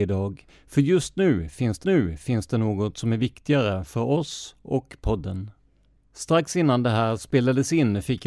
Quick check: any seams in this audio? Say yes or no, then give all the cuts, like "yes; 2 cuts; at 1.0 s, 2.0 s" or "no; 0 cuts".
yes; 2 cuts; at 1.8 s, 6.0 s